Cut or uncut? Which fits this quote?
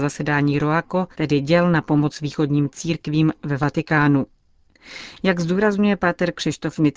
cut